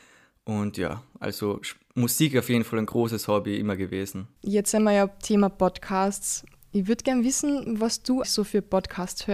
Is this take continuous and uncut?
no; 2 cuts; at 4.3 s, 8.2 s

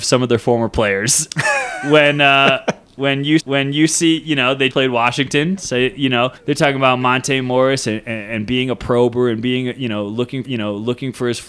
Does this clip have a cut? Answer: yes; 4 cuts; at 3.4 s, 4.7 s, 6.4 s, 10.4 s

